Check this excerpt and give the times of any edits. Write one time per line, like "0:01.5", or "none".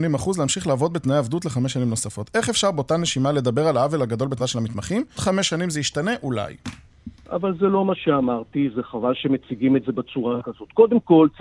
0:04.4
0:05.2